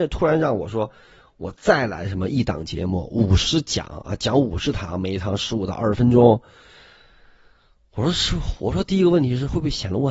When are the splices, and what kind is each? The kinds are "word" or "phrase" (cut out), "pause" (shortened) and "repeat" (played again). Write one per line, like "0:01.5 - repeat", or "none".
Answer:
none

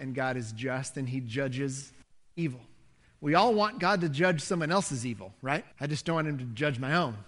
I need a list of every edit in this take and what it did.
0:02.0 - pause
0:05.7 - pause

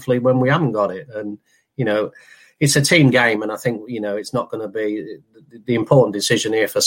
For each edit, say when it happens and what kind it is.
none

